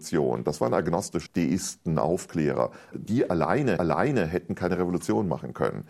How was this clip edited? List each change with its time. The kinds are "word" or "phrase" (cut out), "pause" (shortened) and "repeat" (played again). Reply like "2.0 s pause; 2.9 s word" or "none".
1.3 s word; 2.9 s word; 3.8 s repeat